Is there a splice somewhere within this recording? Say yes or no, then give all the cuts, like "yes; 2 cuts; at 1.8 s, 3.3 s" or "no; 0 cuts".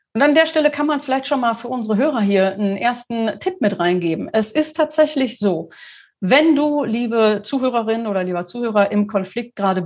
no; 0 cuts